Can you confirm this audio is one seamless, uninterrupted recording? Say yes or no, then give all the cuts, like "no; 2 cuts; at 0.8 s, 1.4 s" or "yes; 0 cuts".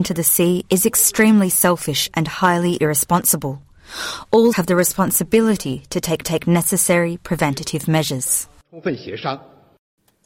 no; 2 cuts; at 4.5 s, 6.2 s